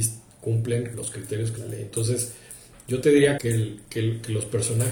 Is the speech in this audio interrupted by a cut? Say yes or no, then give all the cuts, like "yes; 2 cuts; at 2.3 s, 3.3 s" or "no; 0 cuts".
yes; 3 cuts; at 0.9 s, 1.6 s, 3.4 s